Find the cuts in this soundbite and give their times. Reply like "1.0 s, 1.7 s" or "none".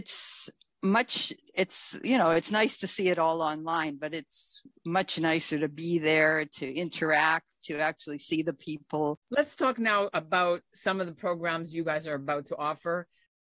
9.2 s